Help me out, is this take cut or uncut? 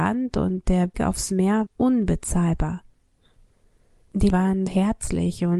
cut